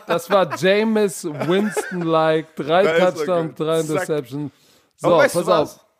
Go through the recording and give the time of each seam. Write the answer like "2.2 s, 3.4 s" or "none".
none